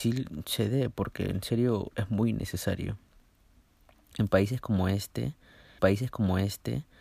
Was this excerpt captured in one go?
no; 1 cut; at 5.8 s

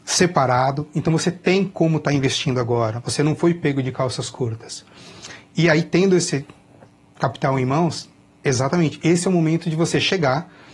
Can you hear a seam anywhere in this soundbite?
no; 0 cuts

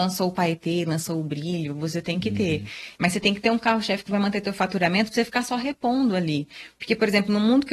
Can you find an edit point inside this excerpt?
no; 0 cuts

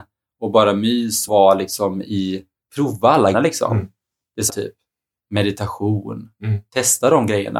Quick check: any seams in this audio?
yes; 4 cuts; at 1.3 s, 2.6 s, 3.3 s, 4.5 s

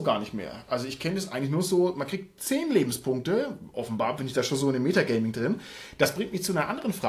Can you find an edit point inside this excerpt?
no; 0 cuts

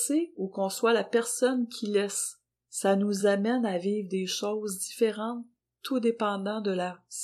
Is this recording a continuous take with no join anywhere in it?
yes; 0 cuts

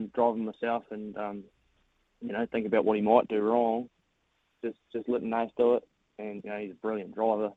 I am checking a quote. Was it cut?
no; 0 cuts

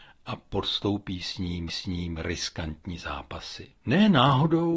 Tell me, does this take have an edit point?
yes; 2 cuts; at 1.7 s, 3.8 s

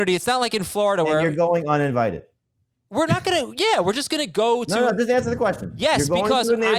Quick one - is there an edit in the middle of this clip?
no; 0 cuts

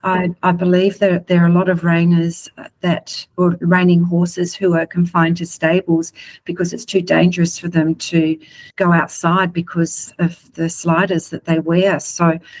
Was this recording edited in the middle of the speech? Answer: yes; 1 cut; at 8.7 s

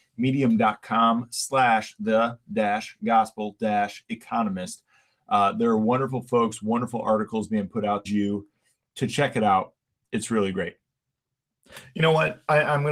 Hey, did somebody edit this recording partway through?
yes; 1 cut; at 8.1 s

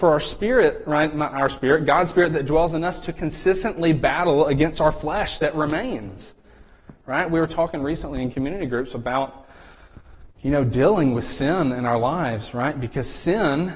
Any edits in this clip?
no; 0 cuts

